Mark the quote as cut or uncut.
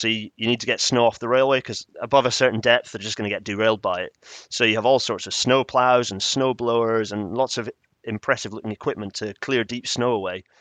cut